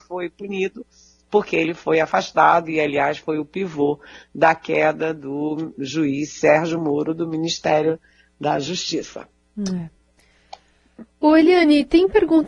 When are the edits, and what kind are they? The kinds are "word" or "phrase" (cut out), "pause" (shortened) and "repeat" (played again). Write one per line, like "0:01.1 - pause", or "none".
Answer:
none